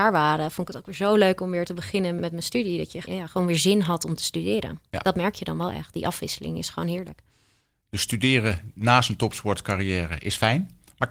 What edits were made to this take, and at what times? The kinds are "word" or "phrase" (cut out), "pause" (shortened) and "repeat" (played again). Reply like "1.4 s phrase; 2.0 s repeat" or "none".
2.2 s word; 3.0 s word; 4.9 s pause